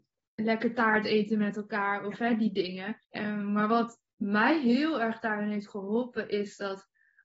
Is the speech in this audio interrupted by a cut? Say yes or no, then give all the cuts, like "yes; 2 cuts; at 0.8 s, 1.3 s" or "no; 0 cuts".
yes; 1 cut; at 3.0 s